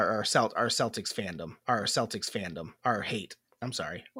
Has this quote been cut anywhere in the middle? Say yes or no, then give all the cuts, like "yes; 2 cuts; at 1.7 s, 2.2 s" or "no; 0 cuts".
yes; 1 cut; at 1.9 s